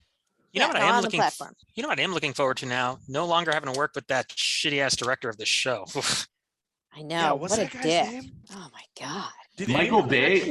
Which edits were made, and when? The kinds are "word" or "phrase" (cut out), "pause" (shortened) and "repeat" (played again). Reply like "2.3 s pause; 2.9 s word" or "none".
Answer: 1.6 s pause; 6.3 s pause; 8.4 s pause; 9.5 s pause